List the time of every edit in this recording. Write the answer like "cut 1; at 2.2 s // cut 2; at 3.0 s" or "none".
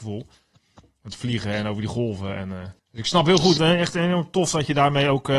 cut 1; at 2.8 s // cut 2; at 3.6 s